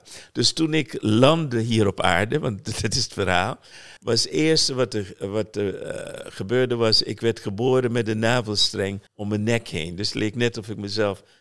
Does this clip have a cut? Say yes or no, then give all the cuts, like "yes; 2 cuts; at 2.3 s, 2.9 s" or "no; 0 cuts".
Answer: yes; 2 cuts; at 4.0 s, 9.1 s